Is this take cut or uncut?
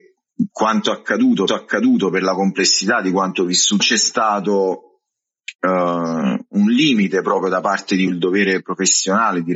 cut